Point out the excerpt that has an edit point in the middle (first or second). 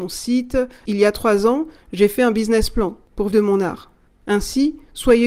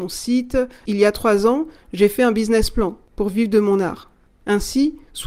first